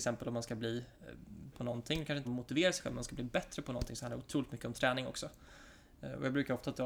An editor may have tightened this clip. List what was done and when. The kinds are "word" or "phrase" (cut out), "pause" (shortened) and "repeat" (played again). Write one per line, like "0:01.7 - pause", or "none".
0:01.5 - word
0:02.2 - word